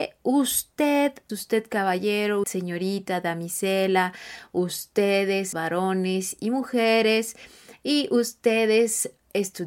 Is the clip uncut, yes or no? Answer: no